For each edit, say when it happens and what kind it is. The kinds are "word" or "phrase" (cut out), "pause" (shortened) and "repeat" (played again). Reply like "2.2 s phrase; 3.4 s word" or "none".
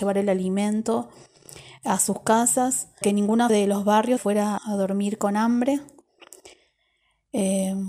3.0 s word; 3.5 s word; 4.2 s word; 4.6 s word